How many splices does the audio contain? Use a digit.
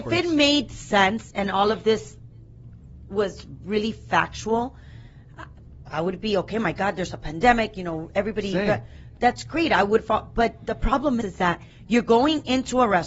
1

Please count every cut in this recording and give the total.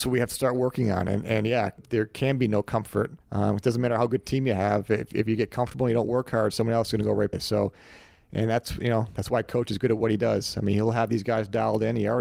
3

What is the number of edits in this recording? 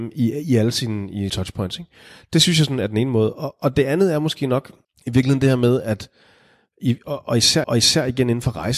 3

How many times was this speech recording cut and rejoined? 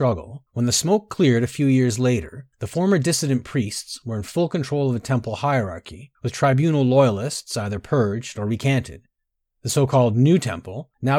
0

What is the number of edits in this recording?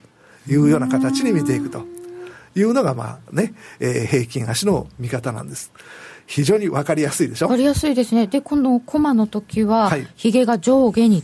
0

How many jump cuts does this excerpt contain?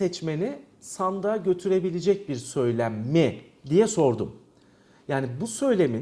0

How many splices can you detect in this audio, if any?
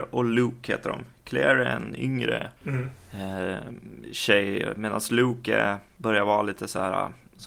1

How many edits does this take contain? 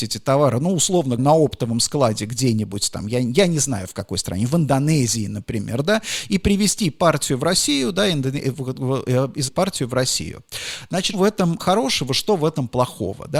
4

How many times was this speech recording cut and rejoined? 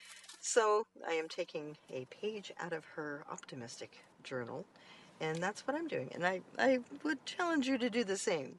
1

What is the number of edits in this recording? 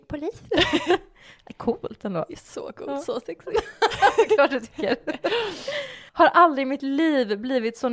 1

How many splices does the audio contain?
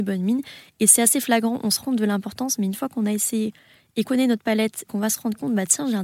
3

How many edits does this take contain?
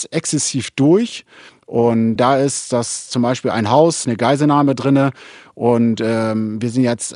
2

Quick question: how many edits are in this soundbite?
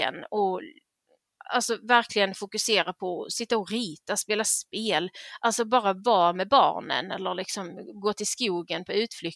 0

